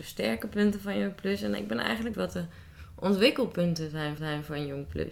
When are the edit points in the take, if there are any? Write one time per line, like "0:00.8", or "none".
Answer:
0:02.1
0:04.2